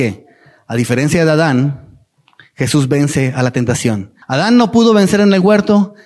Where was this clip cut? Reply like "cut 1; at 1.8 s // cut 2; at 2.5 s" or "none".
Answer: cut 1; at 4.2 s